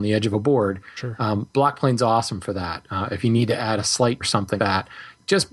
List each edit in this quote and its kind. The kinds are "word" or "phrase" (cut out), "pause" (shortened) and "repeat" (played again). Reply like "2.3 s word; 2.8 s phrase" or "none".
4.2 s word; 4.6 s word

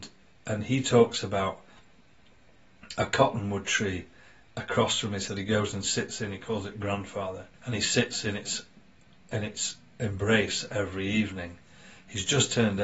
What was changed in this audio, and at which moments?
5.3 s word; 7.5 s pause

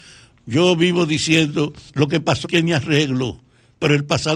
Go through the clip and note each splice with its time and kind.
1.9 s pause; 2.4 s word

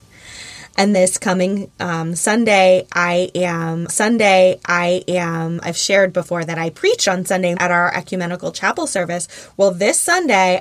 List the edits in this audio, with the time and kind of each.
0.9 s word; 3.9 s repeat; 7.5 s word

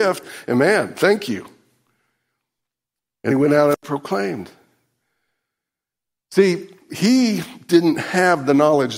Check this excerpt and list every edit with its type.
3.3 s word

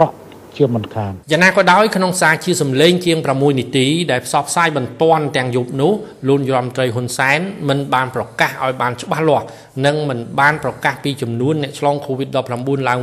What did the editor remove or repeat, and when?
1.2 s pause

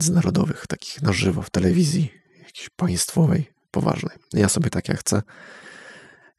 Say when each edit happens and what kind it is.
4.7 s word

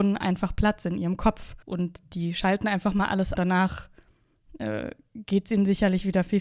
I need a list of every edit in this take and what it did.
1.6 s pause; 3.3 s phrase

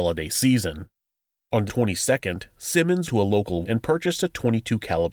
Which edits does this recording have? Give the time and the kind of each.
1.7 s word; 3.1 s word; 3.6 s word

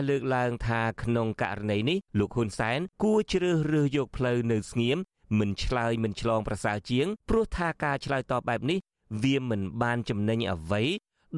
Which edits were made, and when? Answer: 2.1 s pause; 2.9 s pause; 7.2 s pause

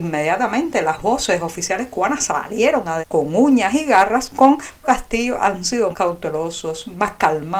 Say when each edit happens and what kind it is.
3.0 s word; 4.8 s word; 5.9 s word

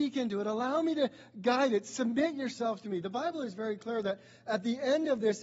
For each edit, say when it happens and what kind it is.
none

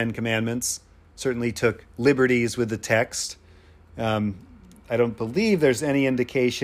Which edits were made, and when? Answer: none

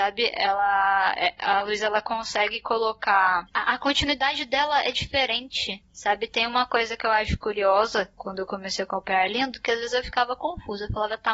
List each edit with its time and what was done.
none

